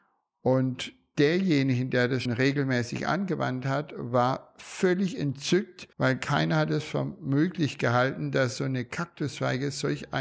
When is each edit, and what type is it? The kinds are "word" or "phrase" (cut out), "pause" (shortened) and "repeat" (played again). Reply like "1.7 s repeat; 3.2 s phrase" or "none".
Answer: 2.2 s word; 5.9 s pause